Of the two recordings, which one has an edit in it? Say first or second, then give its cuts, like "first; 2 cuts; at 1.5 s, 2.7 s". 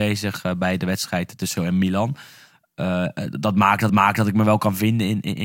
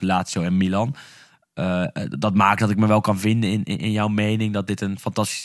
first; 2 cuts; at 1.6 s, 3.9 s